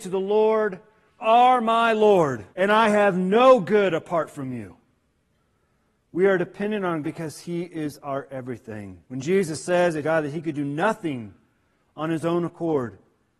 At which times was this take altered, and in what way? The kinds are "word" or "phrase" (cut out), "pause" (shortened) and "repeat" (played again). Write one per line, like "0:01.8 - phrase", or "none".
0:01.2 - word
0:02.5 - pause
0:07.0 - word
0:09.1 - pause
0:10.0 - phrase